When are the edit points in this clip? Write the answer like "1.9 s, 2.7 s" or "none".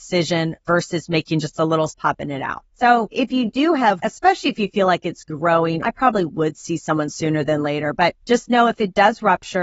1.9 s, 4.0 s, 5.8 s